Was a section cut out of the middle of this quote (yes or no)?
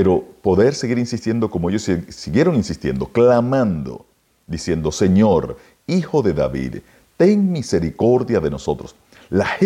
no